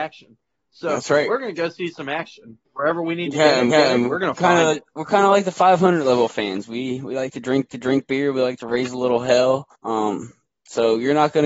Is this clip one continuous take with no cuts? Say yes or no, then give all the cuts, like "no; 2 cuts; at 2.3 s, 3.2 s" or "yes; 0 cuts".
no; 4 cuts; at 2.6 s, 3.7 s, 7.7 s, 9.7 s